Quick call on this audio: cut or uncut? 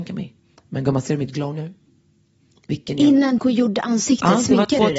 cut